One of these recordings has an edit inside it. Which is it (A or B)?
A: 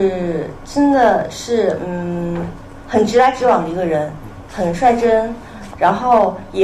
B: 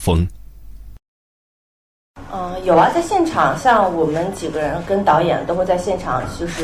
A